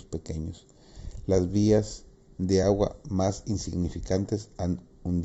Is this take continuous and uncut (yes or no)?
yes